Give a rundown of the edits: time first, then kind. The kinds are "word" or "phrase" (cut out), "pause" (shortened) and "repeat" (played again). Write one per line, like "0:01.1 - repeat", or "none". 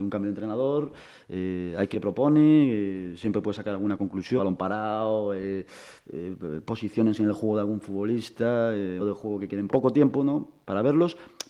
0:01.9 - word
0:04.4 - word
0:09.0 - word
0:09.7 - word